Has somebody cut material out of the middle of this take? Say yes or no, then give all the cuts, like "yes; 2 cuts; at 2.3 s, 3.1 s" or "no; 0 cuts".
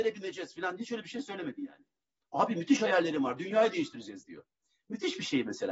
no; 0 cuts